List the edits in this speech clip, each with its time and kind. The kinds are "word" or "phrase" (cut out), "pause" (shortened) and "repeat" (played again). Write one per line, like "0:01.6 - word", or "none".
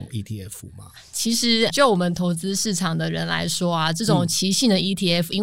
0:01.7 - word